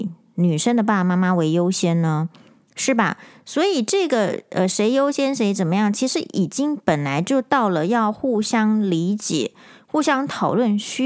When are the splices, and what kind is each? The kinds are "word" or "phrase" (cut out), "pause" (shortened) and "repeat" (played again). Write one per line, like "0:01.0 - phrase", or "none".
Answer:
none